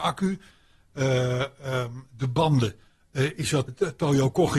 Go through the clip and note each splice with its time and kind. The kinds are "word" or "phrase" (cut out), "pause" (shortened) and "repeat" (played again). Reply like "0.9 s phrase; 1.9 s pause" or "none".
3.7 s word